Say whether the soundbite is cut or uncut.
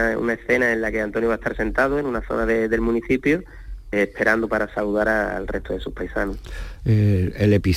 cut